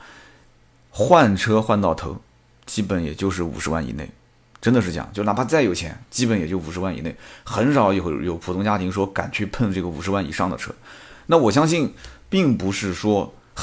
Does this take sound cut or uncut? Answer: uncut